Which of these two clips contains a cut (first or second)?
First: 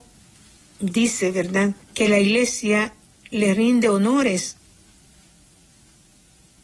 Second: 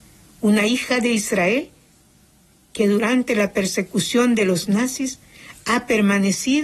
first